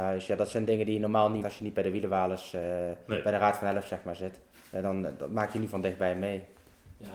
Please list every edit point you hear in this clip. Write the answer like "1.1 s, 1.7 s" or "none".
1.4 s, 4.5 s